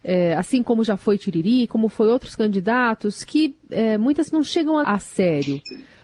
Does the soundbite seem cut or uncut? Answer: cut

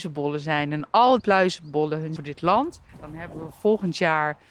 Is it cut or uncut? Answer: cut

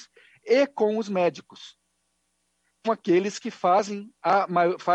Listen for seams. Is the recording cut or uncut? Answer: cut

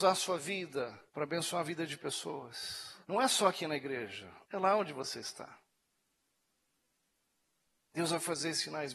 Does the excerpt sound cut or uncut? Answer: cut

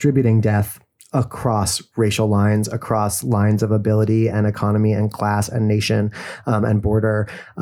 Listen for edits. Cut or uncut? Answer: uncut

